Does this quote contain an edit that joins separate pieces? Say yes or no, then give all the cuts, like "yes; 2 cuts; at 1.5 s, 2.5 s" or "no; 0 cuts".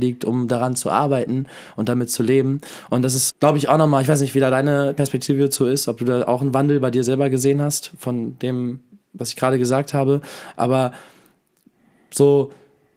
yes; 1 cut; at 3.3 s